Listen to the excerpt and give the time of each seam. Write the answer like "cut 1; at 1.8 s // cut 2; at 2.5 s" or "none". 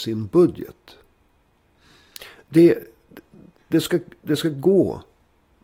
none